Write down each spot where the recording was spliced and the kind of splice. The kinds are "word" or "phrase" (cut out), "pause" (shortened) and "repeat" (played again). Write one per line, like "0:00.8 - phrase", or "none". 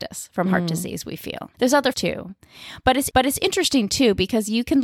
0:01.5 - pause
0:01.9 - word
0:03.1 - repeat